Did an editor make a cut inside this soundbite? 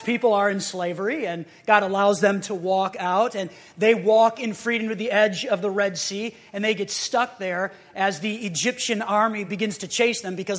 no; 0 cuts

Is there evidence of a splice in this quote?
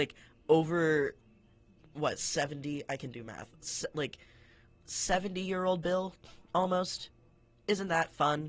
no; 0 cuts

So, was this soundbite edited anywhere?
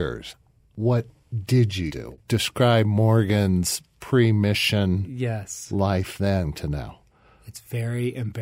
yes; 2 cuts; at 1.9 s, 6.5 s

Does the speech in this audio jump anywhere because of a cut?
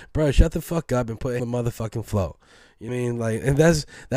yes; 2 cuts; at 1.4 s, 2.9 s

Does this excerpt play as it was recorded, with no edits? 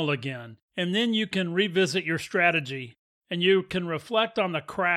yes; 0 cuts

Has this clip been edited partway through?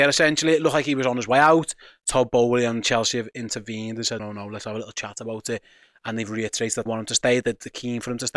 yes; 2 cuts; at 4.2 s, 6.9 s

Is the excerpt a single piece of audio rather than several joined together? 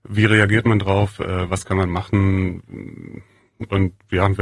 yes; 0 cuts

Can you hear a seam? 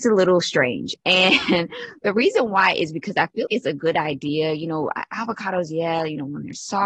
yes; 1 cut; at 3.5 s

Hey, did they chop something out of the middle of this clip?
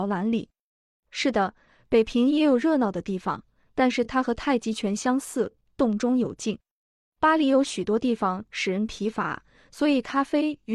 no; 0 cuts

